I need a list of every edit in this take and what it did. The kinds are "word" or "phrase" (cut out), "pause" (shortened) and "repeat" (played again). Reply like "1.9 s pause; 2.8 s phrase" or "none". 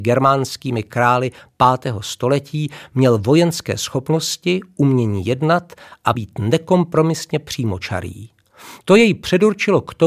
6.1 s word